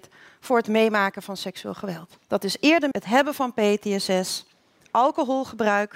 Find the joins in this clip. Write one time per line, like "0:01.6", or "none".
0:02.9